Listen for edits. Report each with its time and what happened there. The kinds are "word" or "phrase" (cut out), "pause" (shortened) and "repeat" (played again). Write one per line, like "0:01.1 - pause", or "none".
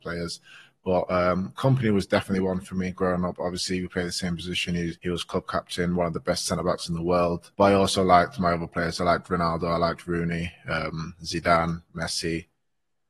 0:05.0 - pause
0:07.5 - pause